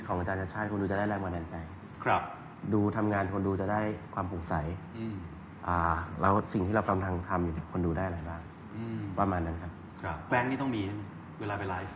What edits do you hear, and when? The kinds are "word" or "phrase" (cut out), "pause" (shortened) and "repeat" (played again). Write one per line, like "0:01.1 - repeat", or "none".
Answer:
0:10.3 - word